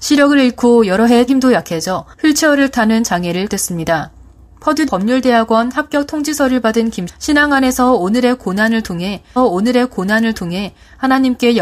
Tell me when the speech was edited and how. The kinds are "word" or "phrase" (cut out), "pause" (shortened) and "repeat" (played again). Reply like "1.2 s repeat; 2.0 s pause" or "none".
1.3 s phrase; 2.1 s pause; 3.5 s word; 4.9 s word; 7.1 s word; 9.4 s repeat

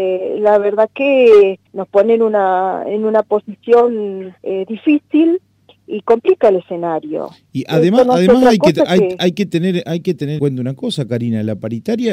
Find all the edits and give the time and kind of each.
1.7 s pause; 4.4 s pause; 10.4 s word

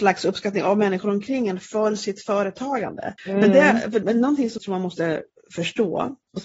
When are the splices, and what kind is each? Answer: 3.2 s pause; 4.0 s word; 4.6 s word

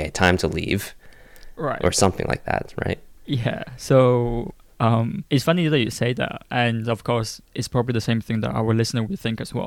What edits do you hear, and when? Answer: 5.3 s pause; 7.4 s pause

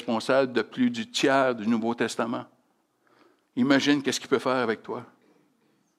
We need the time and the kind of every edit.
none

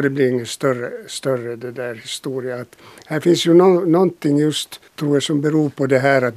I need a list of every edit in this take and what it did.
4.9 s pause

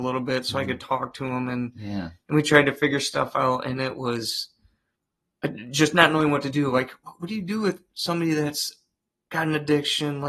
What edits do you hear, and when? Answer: none

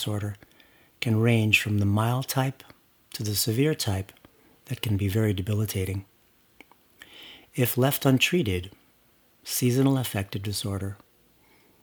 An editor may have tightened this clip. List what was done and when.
none

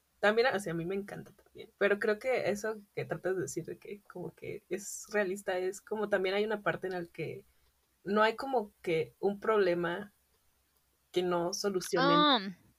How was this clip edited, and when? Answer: 1.7 s pause; 7.7 s pause

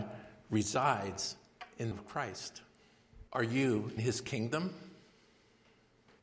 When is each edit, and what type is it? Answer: 1.9 s phrase; 3.3 s pause; 4.0 s word

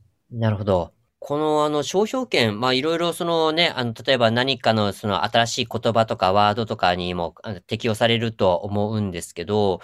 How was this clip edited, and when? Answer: none

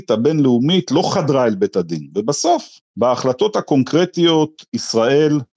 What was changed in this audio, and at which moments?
2.9 s pause

